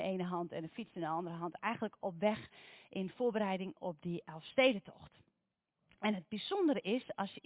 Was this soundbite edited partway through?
no; 0 cuts

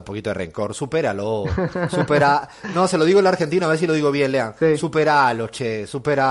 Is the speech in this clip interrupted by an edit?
no; 0 cuts

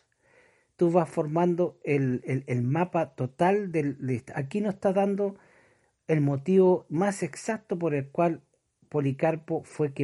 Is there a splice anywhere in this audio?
no; 0 cuts

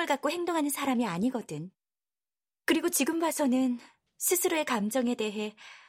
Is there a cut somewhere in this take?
no; 0 cuts

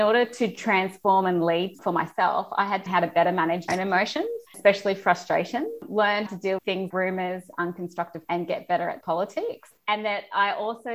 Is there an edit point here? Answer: yes; 8 cuts; at 1.7 s, 2.9 s, 3.7 s, 6.3 s, 6.6 s, 6.9 s, 8.3 s, 9.0 s

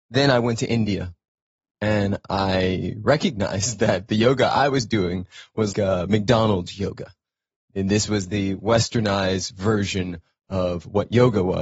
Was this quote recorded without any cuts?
no; 1 cut; at 5.7 s

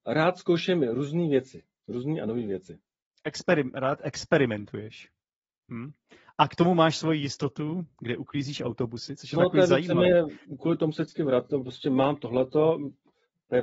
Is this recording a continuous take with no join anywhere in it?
yes; 0 cuts

